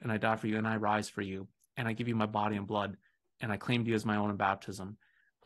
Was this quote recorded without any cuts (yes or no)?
yes